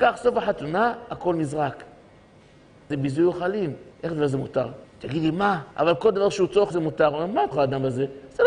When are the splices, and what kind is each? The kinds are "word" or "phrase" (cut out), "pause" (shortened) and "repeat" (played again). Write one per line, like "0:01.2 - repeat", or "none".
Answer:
0:02.9 - phrase
0:03.9 - pause
0:04.8 - pause
0:05.7 - pause
0:06.7 - word
0:07.5 - word